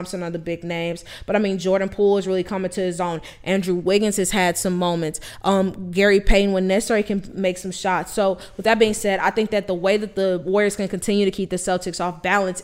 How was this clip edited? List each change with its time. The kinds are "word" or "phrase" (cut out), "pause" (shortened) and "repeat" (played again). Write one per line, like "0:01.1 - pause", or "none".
none